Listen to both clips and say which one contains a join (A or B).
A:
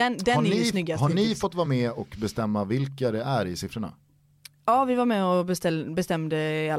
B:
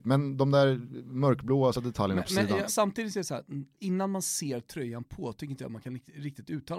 B